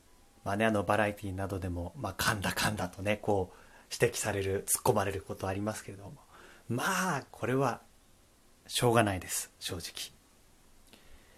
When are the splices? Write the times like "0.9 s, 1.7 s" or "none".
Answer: none

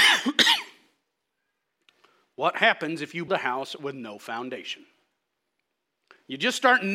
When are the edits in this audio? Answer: 3.3 s

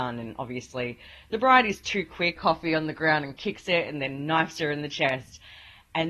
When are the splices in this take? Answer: 2.4 s

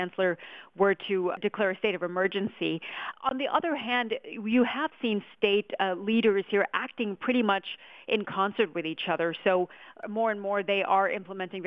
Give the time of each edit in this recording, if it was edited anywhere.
none

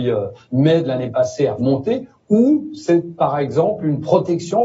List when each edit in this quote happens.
1.6 s

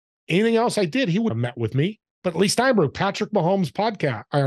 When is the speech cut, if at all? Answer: 1.3 s, 2.1 s

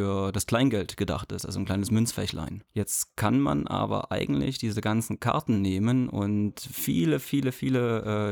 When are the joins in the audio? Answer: 2.7 s

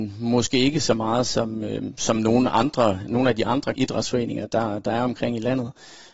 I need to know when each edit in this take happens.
3.7 s

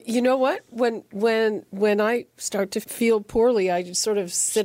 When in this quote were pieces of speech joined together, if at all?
2.8 s

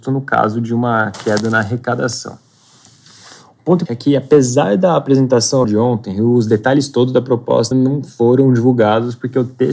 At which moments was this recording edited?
3.9 s, 5.6 s, 7.7 s

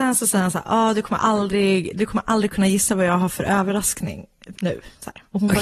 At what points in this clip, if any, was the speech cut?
4.5 s

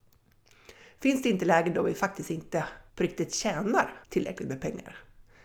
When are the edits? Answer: 2.9 s, 4.0 s

